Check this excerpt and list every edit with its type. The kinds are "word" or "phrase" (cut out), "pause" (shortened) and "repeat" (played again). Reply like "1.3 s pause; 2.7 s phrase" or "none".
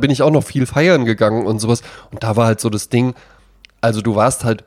none